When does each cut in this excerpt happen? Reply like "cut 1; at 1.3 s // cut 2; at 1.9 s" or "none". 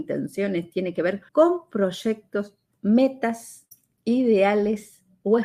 cut 1; at 1.3 s // cut 2; at 2.7 s